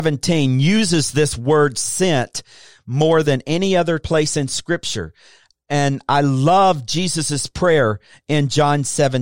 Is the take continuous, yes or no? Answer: yes